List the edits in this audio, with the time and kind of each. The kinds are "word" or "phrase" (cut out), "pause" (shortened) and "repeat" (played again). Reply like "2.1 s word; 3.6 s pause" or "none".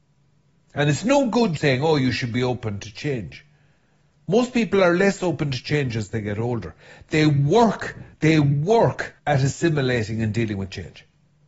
1.6 s word; 8.1 s pause; 9.2 s pause